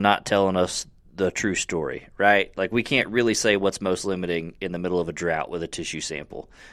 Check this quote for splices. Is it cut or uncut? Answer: uncut